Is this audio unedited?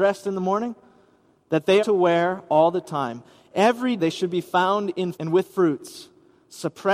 no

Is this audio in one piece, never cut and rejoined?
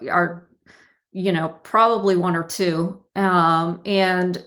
yes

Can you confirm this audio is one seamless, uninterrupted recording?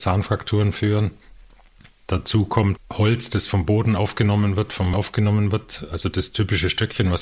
no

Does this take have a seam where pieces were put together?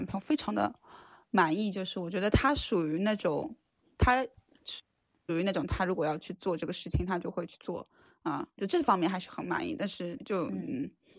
yes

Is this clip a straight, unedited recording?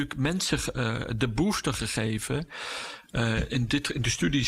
yes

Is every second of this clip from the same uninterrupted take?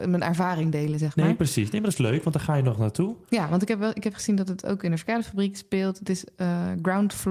yes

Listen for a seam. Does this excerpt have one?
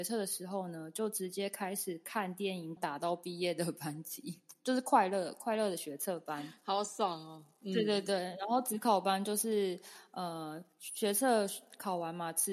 yes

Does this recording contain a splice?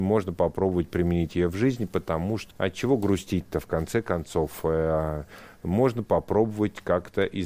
yes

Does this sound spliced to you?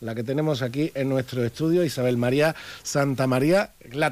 no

